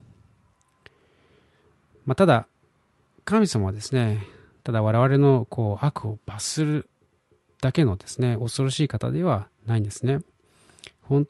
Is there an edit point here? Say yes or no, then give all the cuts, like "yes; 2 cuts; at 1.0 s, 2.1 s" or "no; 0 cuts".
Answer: no; 0 cuts